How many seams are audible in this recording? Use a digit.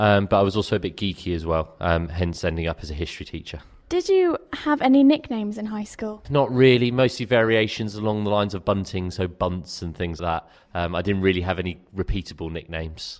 1